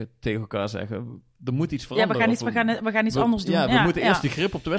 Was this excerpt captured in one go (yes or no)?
yes